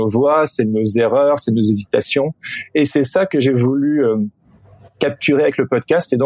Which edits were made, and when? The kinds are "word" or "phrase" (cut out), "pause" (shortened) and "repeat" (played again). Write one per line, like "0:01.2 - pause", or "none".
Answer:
none